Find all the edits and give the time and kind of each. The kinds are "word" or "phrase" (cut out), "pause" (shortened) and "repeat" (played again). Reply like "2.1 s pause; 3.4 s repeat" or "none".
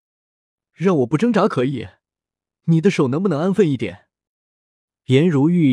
none

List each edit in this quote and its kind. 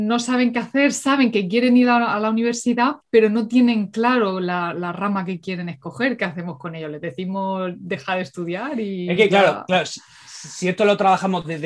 3.0 s pause

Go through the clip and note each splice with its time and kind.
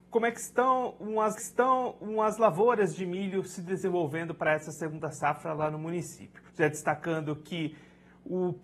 1.4 s repeat; 6.5 s pause

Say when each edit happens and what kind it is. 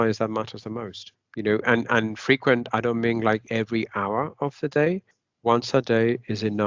5.1 s pause

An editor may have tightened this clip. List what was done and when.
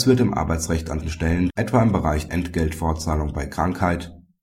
1.0 s word; 1.5 s word; 2.3 s word

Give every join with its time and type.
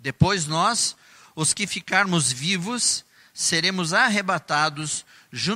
none

